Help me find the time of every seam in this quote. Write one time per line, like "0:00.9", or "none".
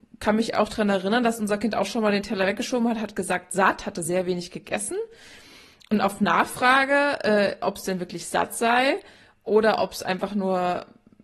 none